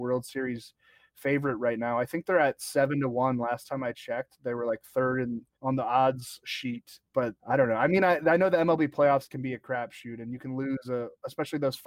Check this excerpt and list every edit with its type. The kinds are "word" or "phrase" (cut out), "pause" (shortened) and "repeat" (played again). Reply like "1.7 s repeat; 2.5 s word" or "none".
none